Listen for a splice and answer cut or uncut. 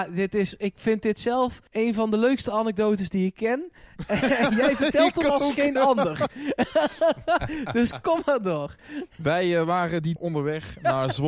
cut